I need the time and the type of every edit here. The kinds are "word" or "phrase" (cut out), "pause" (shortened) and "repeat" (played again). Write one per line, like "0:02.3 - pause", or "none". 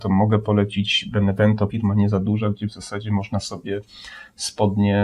0:01.7 - word